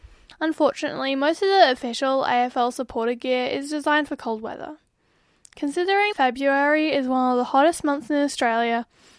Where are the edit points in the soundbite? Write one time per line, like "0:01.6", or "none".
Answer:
0:06.1